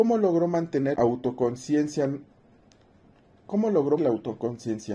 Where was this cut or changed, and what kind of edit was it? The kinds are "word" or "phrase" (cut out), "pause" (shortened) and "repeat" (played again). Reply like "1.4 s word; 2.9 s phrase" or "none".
0.9 s word; 4.0 s word